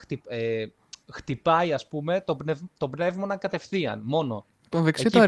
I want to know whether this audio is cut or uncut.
cut